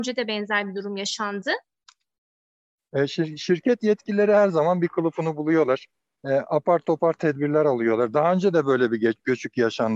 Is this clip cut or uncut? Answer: uncut